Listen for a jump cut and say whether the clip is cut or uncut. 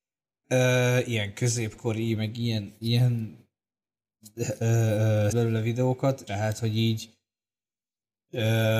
cut